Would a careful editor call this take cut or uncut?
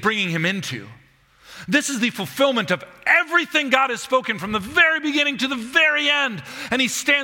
uncut